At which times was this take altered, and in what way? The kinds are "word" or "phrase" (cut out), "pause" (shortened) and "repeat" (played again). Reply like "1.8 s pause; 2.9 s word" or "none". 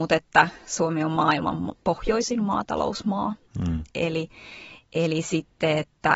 1.8 s pause; 4.8 s pause